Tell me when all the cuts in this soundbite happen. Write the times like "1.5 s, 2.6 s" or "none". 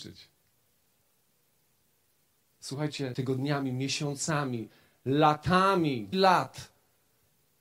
3.1 s, 6.1 s